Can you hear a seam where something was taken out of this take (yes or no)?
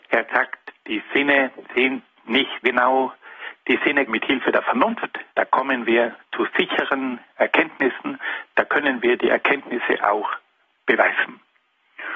yes